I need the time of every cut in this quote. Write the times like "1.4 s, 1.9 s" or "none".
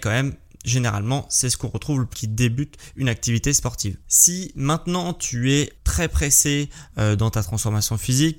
2.1 s, 5.8 s